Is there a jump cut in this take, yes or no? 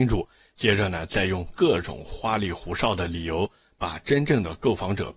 no